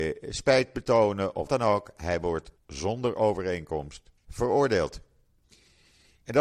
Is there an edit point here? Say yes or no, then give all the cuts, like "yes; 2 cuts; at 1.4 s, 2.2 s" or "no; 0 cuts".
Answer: yes; 3 cuts; at 1.5 s, 2.6 s, 4.2 s